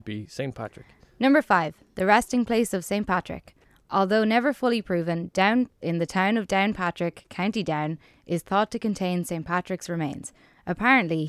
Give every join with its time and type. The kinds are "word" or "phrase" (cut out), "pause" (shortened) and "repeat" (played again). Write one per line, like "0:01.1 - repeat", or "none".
0:05.8 - word